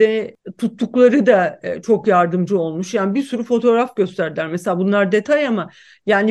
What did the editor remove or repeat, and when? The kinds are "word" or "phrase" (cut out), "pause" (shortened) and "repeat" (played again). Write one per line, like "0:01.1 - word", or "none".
none